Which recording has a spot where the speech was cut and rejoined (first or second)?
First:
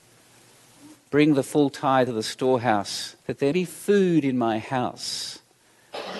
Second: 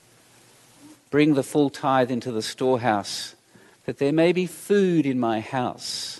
first